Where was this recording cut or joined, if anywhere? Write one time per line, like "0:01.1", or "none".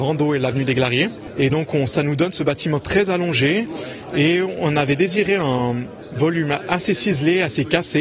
none